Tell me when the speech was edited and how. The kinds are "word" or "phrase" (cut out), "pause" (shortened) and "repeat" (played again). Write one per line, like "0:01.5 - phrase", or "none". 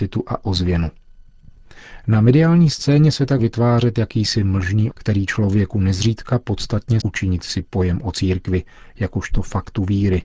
0:03.4 - word
0:04.9 - word
0:07.0 - word